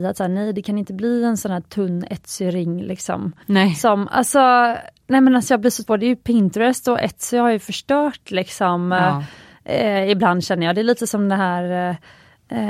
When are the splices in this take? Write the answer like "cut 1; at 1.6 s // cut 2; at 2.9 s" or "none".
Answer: cut 1; at 5.8 s